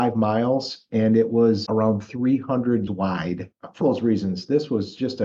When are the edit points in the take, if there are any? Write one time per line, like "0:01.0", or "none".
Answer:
0:01.7
0:02.9
0:03.8